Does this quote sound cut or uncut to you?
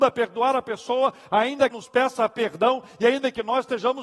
cut